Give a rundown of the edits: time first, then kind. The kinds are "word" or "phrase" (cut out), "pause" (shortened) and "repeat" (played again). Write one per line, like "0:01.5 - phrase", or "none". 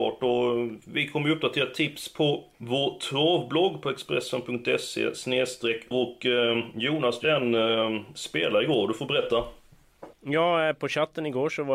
0:02.5 - pause
0:05.9 - word
0:07.2 - word
0:10.1 - pause